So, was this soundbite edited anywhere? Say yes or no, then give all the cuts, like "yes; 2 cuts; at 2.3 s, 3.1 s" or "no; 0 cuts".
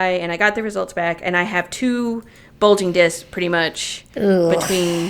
no; 0 cuts